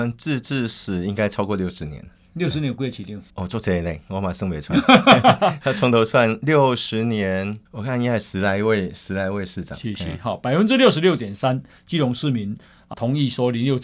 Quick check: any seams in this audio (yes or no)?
yes